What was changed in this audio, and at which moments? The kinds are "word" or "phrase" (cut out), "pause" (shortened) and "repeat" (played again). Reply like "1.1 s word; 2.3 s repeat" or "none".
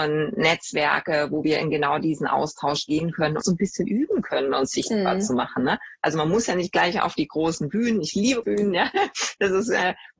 3.4 s word; 8.4 s word

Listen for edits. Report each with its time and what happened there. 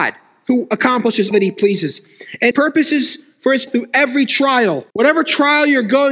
1.3 s word; 2.5 s word; 3.7 s word; 4.9 s pause

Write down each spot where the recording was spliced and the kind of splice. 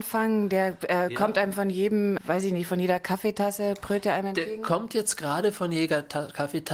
2.2 s word

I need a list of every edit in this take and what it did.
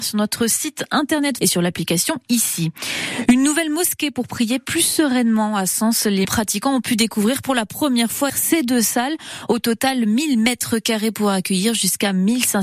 1.4 s word; 6.2 s word; 8.3 s word

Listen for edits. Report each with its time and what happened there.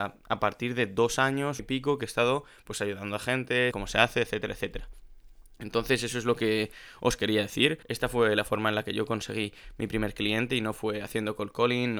1.6 s phrase; 3.7 s word; 7.8 s pause

